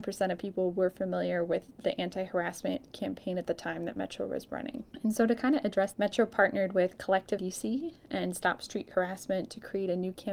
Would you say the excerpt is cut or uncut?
cut